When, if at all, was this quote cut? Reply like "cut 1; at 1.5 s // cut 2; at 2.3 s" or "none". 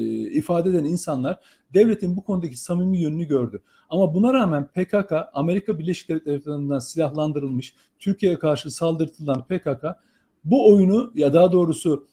none